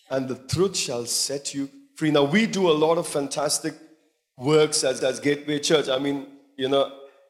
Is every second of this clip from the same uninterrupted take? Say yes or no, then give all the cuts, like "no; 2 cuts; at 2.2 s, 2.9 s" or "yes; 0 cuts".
no; 1 cut; at 5.0 s